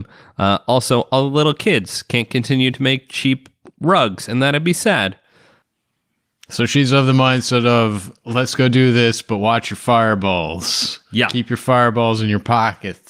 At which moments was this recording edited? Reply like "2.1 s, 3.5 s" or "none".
none